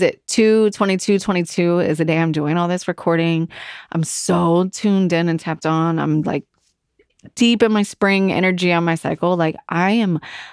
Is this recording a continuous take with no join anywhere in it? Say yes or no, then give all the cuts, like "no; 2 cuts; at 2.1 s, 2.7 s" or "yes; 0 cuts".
yes; 0 cuts